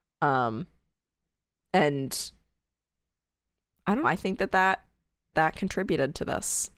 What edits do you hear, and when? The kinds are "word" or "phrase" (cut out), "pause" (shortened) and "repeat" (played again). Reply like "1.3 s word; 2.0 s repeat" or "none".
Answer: 4.0 s word; 5.3 s word